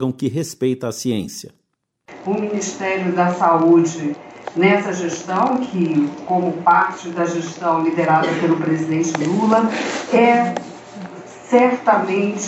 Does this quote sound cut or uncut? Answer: uncut